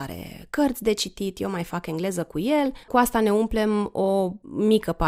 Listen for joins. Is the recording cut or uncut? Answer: cut